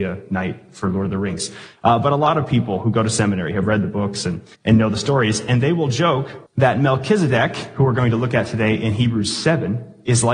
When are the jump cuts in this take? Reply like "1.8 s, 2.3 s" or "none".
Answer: 4.5 s, 6.5 s